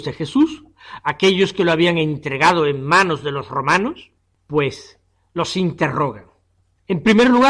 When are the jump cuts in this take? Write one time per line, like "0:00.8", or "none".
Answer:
0:04.2